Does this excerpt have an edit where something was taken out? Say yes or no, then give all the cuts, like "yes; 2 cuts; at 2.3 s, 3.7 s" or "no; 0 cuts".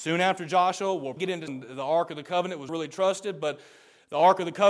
yes; 3 cuts; at 1.2 s, 1.5 s, 2.7 s